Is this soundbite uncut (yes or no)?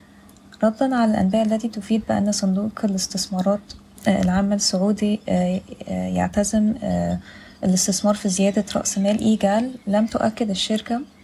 yes